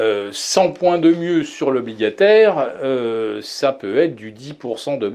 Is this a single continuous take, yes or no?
yes